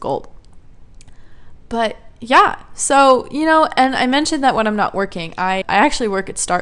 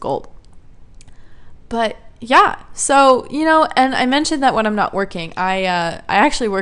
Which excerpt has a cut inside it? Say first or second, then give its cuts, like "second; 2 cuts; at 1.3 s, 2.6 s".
first; 1 cut; at 5.6 s